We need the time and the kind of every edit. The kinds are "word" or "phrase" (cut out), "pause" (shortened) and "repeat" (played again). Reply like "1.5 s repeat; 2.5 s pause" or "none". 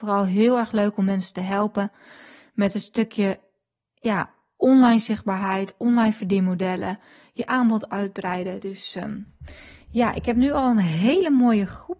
none